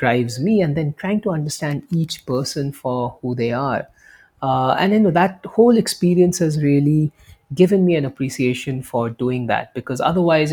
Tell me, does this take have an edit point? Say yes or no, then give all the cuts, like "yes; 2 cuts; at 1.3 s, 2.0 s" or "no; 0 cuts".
no; 0 cuts